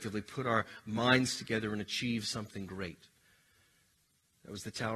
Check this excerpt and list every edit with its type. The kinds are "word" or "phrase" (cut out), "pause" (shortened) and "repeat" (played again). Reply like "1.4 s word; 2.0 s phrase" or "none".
none